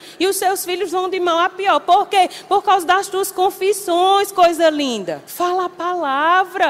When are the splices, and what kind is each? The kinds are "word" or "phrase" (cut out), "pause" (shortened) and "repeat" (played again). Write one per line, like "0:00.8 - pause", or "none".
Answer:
0:05.3 - pause